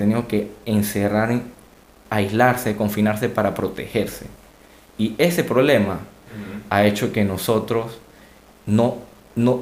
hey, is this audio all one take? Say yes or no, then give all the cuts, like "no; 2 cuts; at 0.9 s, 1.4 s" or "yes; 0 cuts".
yes; 0 cuts